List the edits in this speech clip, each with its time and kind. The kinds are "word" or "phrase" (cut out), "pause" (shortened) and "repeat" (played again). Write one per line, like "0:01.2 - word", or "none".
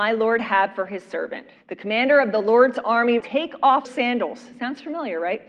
0:01.6 - pause
0:03.2 - word
0:03.9 - word